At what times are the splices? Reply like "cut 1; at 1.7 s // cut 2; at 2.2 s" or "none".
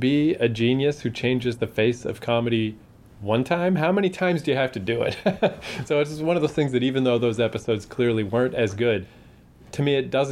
none

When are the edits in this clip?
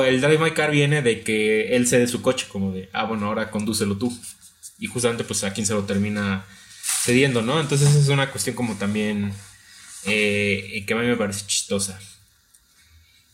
none

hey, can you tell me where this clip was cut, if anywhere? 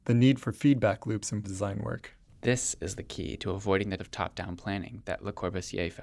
cut 1; at 1.4 s // cut 2; at 2.3 s // cut 3; at 4.0 s

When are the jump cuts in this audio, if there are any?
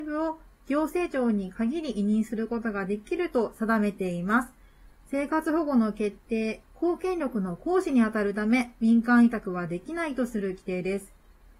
cut 1; at 6.6 s

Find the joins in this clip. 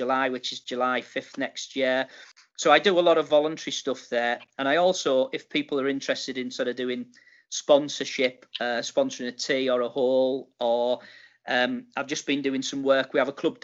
none

